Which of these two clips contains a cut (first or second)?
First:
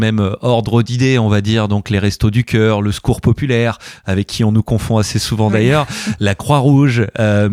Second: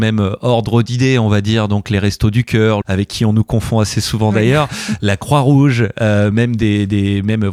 second